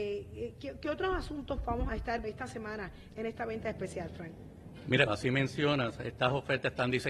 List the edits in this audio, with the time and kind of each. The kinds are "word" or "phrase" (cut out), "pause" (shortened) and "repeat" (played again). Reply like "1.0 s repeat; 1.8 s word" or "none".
1.9 s word; 2.2 s word; 5.1 s word